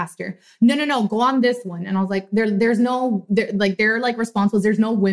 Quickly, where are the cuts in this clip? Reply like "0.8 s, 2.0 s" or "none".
none